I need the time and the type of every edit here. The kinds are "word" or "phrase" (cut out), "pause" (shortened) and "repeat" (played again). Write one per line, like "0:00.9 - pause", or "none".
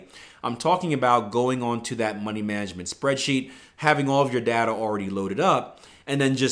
none